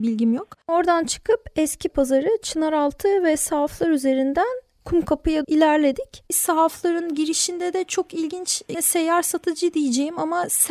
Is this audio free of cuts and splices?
no; 3 cuts; at 1.9 s, 5.4 s, 8.7 s

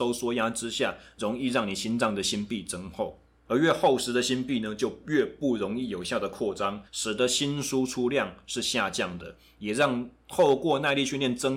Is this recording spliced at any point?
yes; 1 cut; at 6.9 s

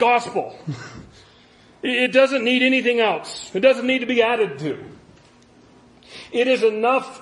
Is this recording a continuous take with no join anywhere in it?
yes; 0 cuts

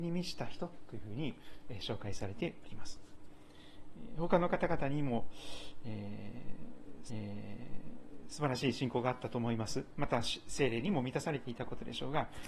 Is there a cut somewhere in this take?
yes; 1 cut; at 7.1 s

